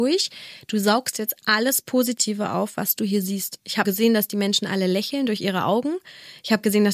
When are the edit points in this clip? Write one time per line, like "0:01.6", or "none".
0:03.8